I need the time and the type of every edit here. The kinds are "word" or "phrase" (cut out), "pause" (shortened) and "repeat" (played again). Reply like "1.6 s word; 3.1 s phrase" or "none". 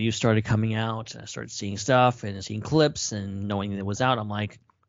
2.4 s word